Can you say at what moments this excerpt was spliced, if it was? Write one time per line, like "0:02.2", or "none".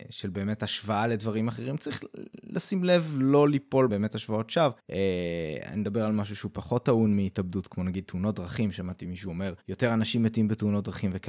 0:03.9
0:04.8
0:09.6